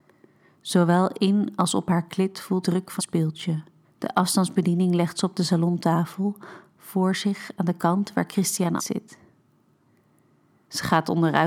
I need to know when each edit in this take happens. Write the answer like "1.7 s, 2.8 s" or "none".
2.6 s, 3.0 s, 3.8 s, 8.8 s